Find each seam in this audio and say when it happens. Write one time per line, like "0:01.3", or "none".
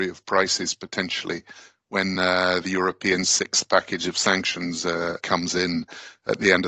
none